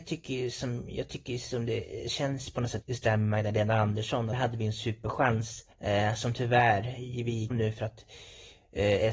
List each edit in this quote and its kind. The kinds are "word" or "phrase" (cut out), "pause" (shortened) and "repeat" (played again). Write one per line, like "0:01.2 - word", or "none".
0:02.8 - word
0:04.3 - phrase
0:05.7 - pause
0:07.5 - phrase